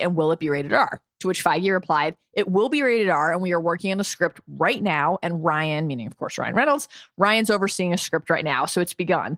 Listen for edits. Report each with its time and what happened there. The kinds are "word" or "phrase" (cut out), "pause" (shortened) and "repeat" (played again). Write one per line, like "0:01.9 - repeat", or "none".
none